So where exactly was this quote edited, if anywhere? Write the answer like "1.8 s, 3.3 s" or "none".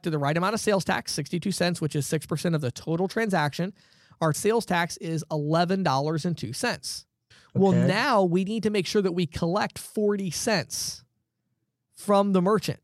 4.3 s, 7.3 s